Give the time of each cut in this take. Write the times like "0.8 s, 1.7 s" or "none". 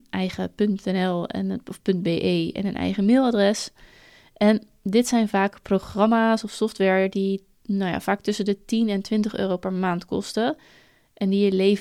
none

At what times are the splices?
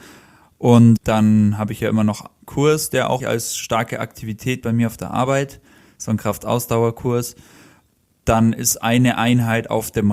1.0 s, 2.4 s, 3.2 s, 4.6 s

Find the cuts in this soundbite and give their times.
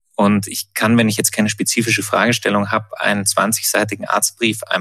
none

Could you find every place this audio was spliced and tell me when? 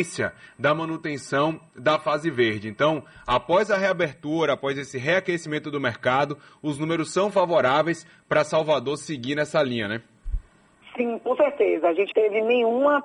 12.1 s

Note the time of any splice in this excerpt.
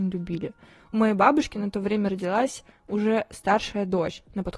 none

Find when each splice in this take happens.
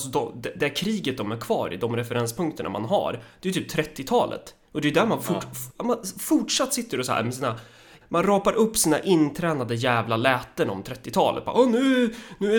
none

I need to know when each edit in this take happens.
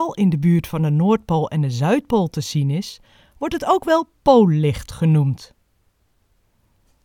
none

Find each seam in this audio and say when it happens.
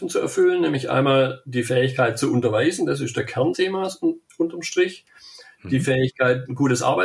3.5 s

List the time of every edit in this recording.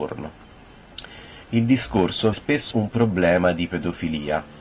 1.4 s, 2.3 s, 2.7 s

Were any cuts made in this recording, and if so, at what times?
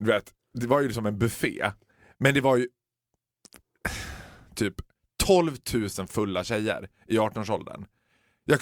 none

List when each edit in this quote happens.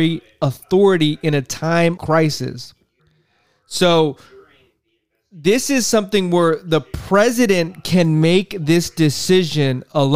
2.0 s, 3.0 s

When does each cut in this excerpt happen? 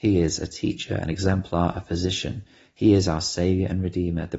none

